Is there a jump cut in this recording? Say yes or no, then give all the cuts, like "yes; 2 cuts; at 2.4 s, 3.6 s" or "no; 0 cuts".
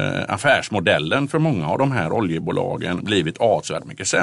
no; 0 cuts